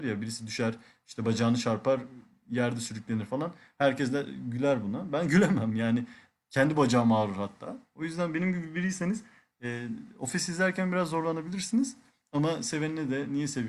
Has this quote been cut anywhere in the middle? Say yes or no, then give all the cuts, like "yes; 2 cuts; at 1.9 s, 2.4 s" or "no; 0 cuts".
no; 0 cuts